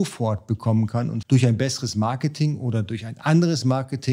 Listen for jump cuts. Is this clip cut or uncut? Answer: cut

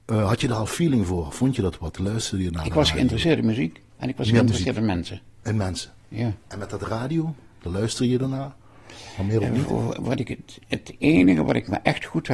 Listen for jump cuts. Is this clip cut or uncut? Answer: cut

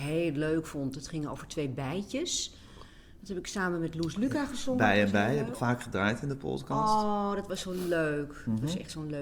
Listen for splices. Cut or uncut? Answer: cut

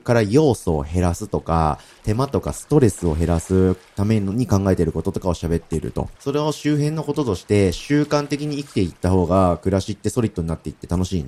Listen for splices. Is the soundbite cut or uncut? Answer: cut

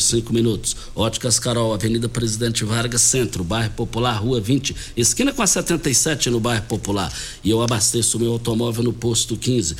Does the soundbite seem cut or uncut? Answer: uncut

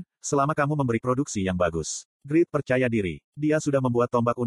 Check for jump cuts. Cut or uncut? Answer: cut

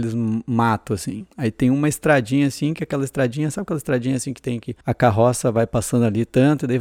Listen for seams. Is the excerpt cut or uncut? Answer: cut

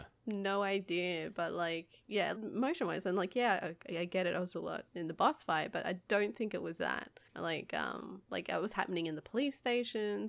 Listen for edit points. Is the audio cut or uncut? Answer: cut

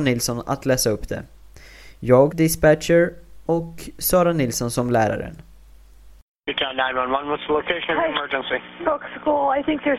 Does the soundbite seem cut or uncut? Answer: cut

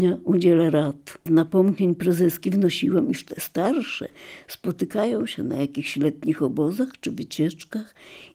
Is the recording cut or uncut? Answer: uncut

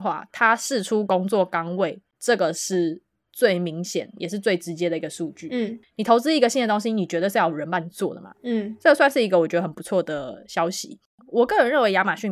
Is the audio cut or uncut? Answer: uncut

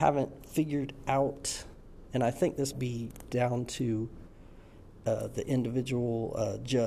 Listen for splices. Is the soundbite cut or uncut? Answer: cut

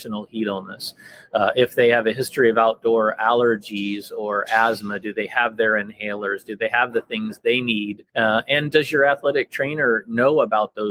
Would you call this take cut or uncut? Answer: cut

